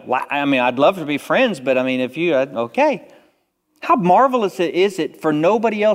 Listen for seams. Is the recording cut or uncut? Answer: uncut